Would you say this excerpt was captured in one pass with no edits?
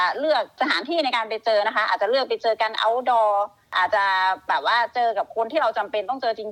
yes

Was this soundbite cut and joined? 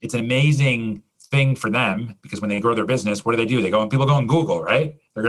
no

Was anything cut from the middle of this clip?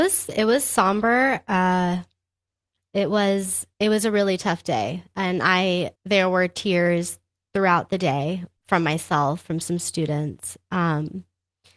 yes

